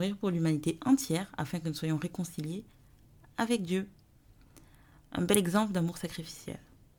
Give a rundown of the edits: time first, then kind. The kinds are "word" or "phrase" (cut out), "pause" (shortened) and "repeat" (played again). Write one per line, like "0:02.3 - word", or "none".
none